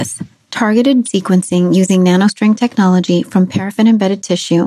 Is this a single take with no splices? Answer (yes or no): no